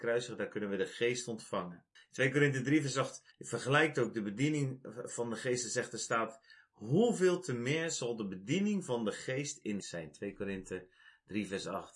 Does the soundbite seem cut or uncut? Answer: cut